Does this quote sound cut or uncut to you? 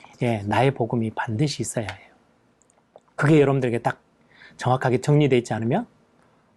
uncut